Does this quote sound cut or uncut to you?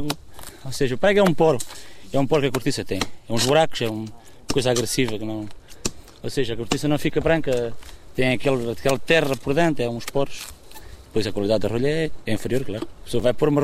uncut